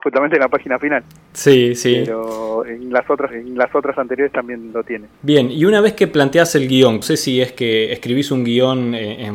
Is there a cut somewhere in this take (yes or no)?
yes